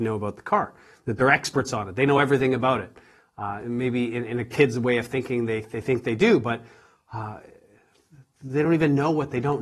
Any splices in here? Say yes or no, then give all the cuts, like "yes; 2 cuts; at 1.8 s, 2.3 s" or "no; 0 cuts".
no; 0 cuts